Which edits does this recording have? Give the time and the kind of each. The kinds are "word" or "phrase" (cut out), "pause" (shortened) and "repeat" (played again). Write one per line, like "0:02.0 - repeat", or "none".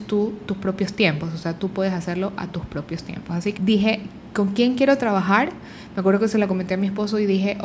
0:03.6 - word